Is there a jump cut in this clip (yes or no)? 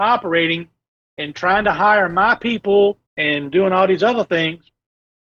yes